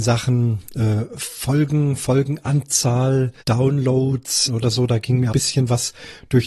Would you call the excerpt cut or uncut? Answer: cut